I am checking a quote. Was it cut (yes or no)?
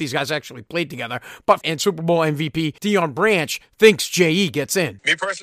yes